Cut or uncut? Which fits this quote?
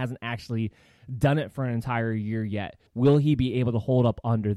cut